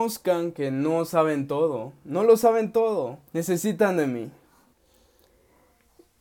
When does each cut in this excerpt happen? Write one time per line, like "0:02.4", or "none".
0:03.3